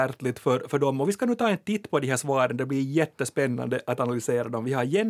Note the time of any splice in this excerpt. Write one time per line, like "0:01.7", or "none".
none

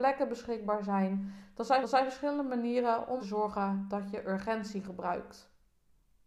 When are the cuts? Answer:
0:01.8
0:03.2

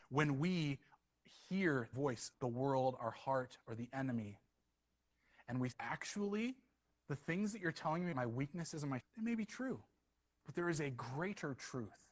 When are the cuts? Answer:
0:01.9
0:02.3
0:05.7
0:08.1
0:09.0

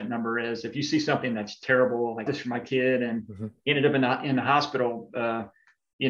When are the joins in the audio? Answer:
0:02.3

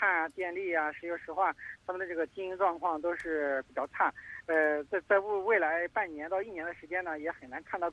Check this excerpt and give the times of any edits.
none

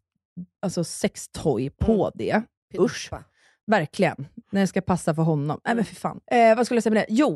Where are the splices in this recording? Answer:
none

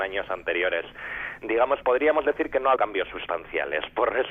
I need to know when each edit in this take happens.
0:01.8
0:02.8

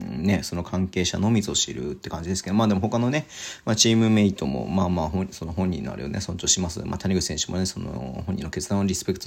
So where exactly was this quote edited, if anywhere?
none

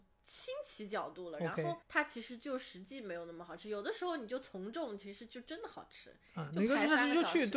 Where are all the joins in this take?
0:01.8

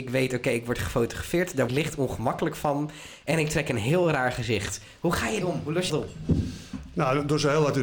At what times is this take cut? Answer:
0:01.7
0:05.4
0:05.9

